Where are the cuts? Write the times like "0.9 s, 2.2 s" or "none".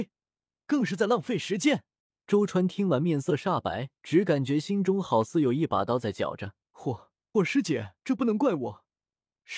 2.0 s, 4.0 s, 6.7 s, 7.3 s, 8.0 s

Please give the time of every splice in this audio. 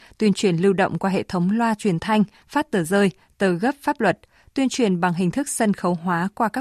none

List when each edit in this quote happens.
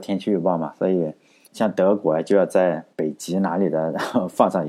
1.5 s, 2.9 s

